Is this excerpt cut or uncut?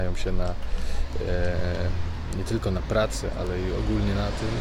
uncut